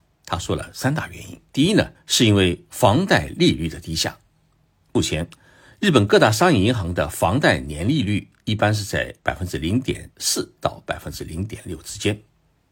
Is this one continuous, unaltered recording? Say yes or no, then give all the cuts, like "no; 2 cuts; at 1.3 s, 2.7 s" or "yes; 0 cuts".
no; 3 cuts; at 1.5 s, 1.9 s, 9.2 s